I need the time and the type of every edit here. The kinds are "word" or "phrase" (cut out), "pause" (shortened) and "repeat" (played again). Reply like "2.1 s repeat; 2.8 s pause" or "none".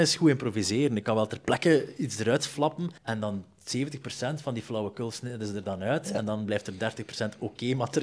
3.0 s pause